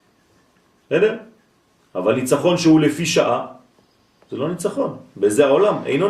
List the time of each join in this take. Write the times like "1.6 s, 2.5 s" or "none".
none